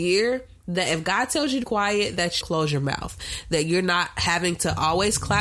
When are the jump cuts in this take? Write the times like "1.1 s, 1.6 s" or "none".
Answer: 1.6 s, 2.4 s